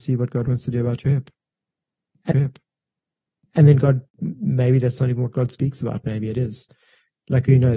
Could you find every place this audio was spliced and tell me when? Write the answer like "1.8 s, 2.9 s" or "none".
2.3 s, 4.1 s